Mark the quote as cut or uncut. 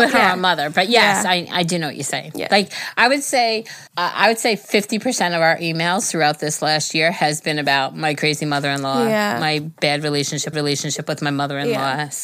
cut